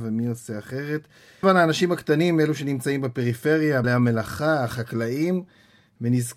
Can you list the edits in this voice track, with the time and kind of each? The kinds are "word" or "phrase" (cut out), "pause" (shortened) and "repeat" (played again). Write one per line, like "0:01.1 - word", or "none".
0:01.4 - word
0:03.8 - word